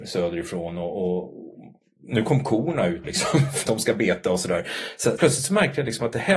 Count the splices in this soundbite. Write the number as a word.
three